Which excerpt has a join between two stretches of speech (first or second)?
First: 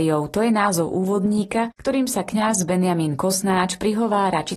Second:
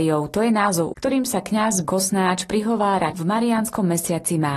second